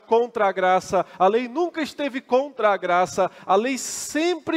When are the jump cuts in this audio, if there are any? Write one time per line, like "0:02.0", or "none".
none